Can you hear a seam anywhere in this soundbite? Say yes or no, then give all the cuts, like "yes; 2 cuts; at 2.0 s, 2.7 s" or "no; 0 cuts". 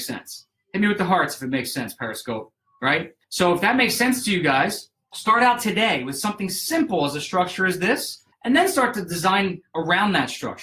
yes; 1 cut; at 3.2 s